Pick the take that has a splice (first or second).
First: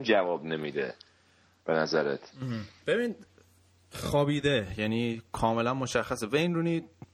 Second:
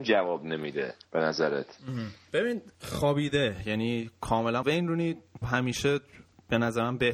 second